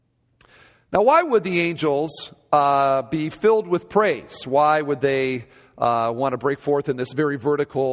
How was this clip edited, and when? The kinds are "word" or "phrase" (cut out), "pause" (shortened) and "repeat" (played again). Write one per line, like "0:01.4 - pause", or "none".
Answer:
none